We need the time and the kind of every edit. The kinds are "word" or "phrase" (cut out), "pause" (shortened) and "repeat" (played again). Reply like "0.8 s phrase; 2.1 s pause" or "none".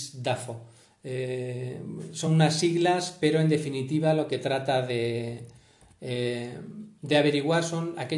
none